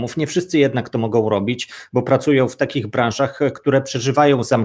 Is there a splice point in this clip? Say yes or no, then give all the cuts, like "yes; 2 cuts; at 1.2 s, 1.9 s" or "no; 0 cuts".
no; 0 cuts